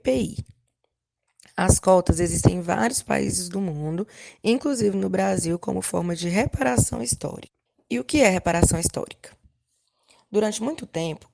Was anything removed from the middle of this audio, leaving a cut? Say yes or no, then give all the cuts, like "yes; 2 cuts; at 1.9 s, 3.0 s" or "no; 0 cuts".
yes; 1 cut; at 7.7 s